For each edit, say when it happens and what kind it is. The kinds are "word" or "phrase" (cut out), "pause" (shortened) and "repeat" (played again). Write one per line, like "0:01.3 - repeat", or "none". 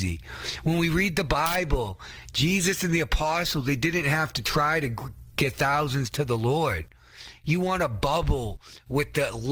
none